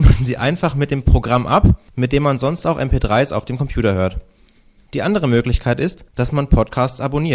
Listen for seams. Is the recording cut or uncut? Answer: cut